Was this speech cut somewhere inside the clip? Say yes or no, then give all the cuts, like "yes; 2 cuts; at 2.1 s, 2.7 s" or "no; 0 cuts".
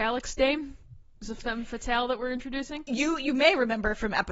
no; 0 cuts